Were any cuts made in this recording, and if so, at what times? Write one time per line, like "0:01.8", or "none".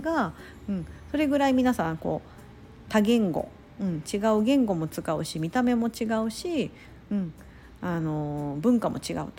none